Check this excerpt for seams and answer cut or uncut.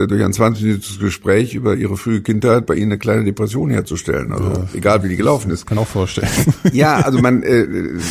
cut